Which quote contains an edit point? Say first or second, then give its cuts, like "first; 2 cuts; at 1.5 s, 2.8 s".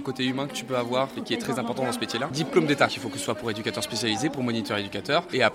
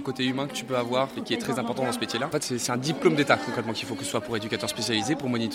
first; 2 cuts; at 2.3 s, 2.9 s